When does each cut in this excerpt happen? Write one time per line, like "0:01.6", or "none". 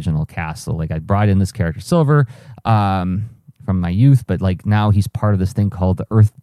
none